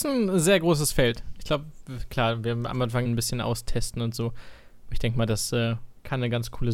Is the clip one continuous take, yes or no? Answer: no